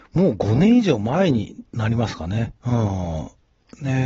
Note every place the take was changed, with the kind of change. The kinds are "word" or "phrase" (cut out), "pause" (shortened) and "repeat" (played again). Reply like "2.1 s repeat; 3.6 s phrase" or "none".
2.6 s pause